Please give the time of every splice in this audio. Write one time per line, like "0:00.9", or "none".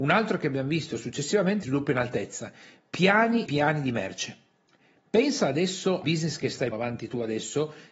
0:01.6
0:03.4
0:06.0
0:06.7